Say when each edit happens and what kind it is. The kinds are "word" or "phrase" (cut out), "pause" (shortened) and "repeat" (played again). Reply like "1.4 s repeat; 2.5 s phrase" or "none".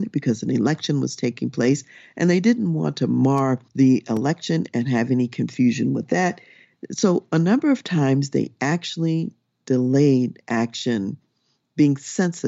3.7 s pause